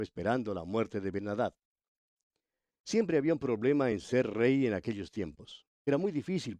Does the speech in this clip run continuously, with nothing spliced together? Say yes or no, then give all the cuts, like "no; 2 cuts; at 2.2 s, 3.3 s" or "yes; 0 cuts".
yes; 0 cuts